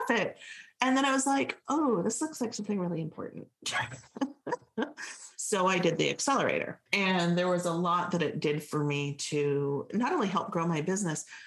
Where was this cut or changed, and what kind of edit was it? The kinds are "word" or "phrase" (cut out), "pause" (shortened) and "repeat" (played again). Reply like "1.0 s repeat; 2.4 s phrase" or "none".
6.9 s pause